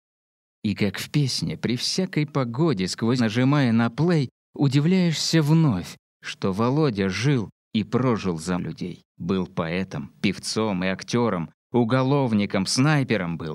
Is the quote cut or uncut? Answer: cut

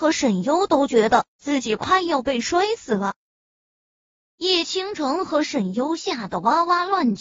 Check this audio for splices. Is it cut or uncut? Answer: uncut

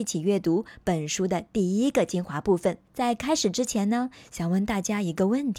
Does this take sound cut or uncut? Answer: cut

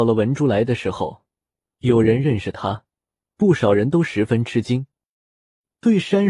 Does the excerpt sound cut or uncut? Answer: uncut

